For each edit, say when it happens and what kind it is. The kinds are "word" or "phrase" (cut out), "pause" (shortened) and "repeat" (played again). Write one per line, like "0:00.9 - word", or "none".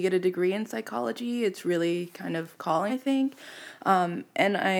0:02.9 - phrase